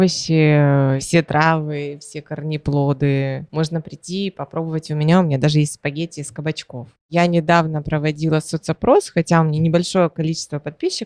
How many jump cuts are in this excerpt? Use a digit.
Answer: 0